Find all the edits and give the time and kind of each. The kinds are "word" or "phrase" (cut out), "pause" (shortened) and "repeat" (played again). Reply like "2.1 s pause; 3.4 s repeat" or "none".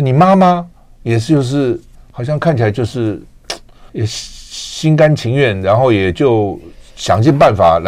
1.9 s pause; 3.9 s pause